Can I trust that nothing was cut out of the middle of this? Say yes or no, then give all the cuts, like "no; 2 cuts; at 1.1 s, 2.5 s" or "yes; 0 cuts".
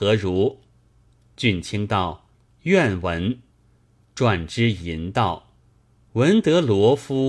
no; 3 cuts; at 2.3 s, 3.5 s, 5.6 s